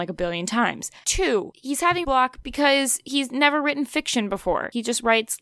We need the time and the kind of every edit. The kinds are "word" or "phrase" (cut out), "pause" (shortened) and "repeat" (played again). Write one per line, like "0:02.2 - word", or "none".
0:02.0 - word